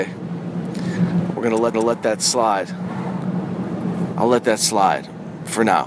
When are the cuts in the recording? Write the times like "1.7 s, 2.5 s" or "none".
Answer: 1.7 s

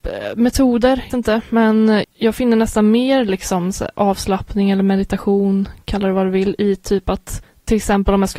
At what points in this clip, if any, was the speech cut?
1.1 s, 2.0 s

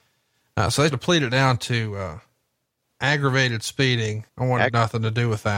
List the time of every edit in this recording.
0.9 s, 4.3 s

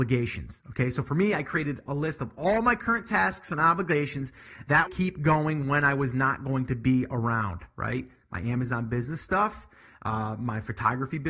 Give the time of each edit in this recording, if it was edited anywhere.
4.9 s

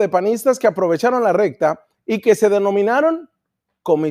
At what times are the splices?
none

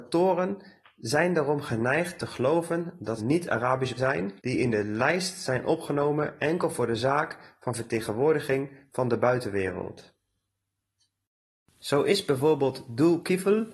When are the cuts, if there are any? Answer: 3.2 s, 4.0 s, 4.4 s

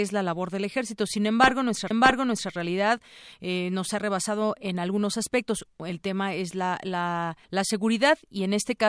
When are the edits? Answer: 1.9 s, 7.4 s

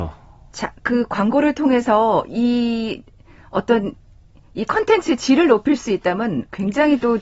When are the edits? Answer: none

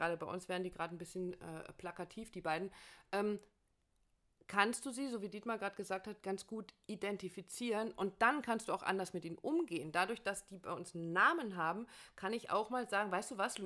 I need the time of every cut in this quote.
none

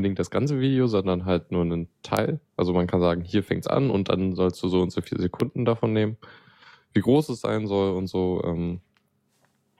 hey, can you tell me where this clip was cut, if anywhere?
none

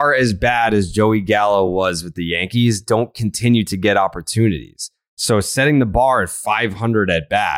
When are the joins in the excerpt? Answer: none

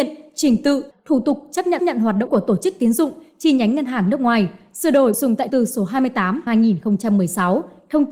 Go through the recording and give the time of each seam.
1.8 s, 2.3 s, 5.1 s, 5.5 s, 6.5 s

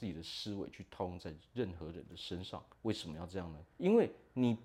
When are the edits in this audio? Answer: 2.7 s, 3.7 s

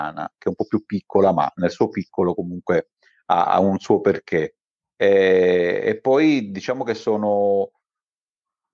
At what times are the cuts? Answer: none

